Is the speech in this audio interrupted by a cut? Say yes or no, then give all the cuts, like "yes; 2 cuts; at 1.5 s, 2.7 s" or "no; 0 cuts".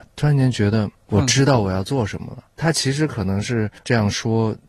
yes; 2 cuts; at 0.9 s, 3.8 s